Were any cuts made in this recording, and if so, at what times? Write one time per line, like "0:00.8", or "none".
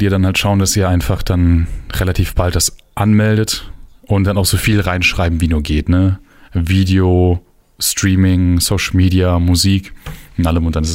none